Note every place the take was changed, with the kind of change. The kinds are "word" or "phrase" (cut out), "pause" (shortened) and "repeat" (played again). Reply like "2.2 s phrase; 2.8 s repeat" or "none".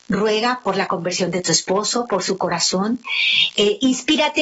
none